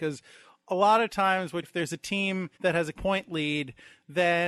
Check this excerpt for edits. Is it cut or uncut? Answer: cut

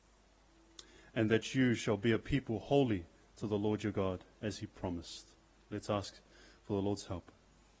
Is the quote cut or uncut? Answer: uncut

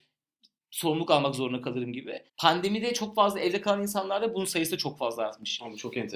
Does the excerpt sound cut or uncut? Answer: cut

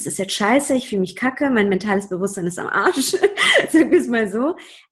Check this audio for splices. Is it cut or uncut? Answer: uncut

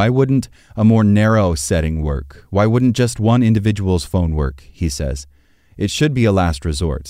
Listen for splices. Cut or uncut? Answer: uncut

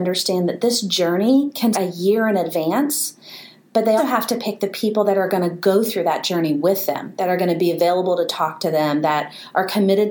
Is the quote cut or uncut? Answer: cut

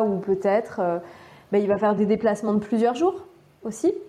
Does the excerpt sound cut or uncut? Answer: uncut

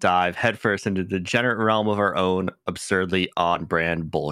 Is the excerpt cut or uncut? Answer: uncut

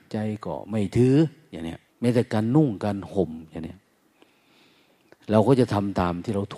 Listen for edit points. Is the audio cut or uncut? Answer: cut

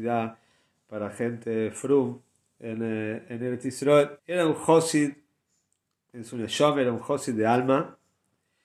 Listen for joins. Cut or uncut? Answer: cut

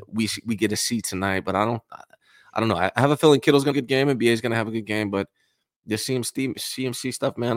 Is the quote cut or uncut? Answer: cut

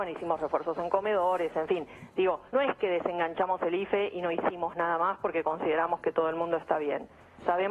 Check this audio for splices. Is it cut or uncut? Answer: cut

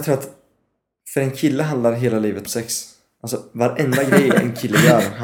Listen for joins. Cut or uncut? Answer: cut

